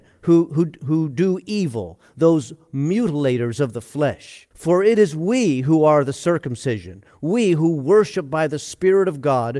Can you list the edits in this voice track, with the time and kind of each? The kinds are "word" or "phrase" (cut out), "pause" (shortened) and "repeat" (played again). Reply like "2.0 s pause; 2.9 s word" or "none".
4.5 s pause